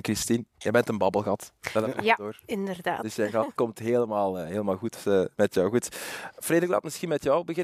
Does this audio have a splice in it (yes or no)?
yes